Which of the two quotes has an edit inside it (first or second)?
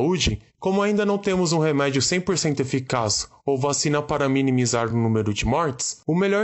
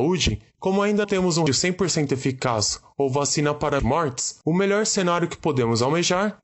second